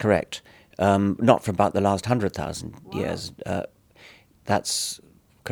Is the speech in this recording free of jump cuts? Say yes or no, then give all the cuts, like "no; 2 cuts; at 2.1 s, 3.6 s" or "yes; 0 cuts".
yes; 0 cuts